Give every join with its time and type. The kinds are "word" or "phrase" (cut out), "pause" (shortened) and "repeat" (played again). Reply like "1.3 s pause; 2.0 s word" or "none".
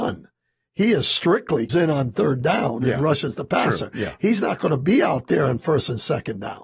1.7 s word